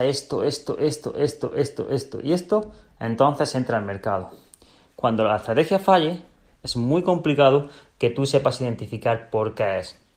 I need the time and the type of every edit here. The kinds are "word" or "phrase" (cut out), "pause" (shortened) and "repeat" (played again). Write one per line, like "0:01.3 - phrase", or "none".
none